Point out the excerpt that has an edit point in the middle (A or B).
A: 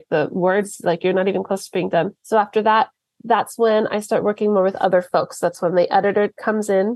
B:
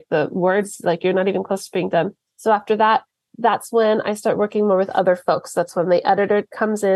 A